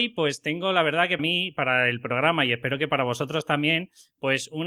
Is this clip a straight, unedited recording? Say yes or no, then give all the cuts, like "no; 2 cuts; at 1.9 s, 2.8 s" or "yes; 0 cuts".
no; 1 cut; at 1.2 s